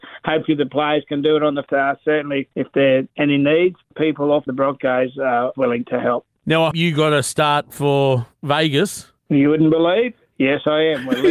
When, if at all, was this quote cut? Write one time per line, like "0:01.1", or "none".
0:01.7
0:02.5
0:03.1
0:03.9
0:04.5
0:05.5
0:06.7
0:09.2